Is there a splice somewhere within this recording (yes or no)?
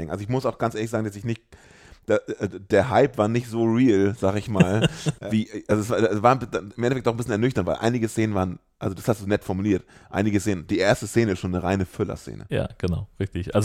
no